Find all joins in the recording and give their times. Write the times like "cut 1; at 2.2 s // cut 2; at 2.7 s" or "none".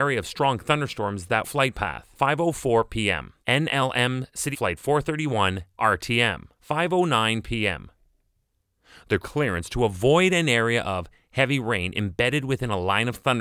cut 1; at 1.4 s // cut 2; at 2.1 s // cut 3; at 3.4 s // cut 4; at 4.5 s // cut 5; at 5.8 s // cut 6; at 6.6 s // cut 7; at 9.2 s